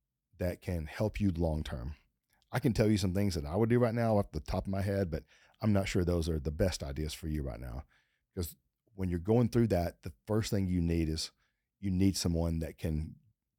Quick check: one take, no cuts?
yes; 0 cuts

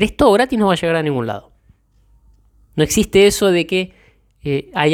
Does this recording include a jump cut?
no; 0 cuts

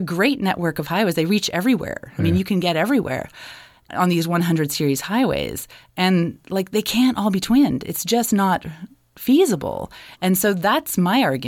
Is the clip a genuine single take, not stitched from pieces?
yes; 0 cuts

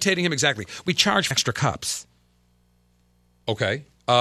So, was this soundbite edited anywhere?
yes; 1 cut; at 1.3 s

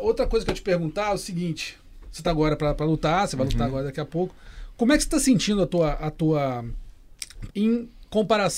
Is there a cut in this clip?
yes; 2 cuts; at 2.2 s, 7.5 s

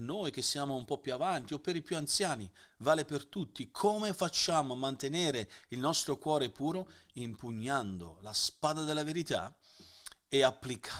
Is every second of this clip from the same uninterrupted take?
yes; 0 cuts

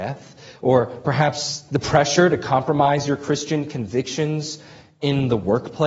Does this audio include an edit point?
no; 0 cuts

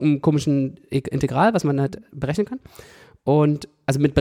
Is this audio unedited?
yes; 0 cuts

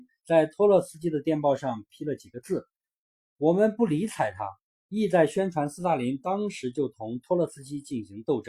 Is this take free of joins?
no; 2 cuts; at 2.7 s, 4.6 s

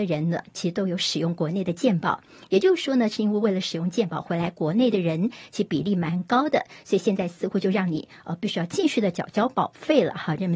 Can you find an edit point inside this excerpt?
no; 0 cuts

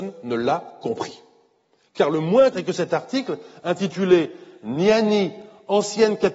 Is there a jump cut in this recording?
yes; 1 cut; at 2.5 s

